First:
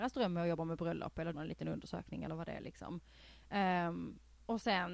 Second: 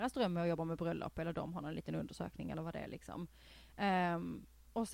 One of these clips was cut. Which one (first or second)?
first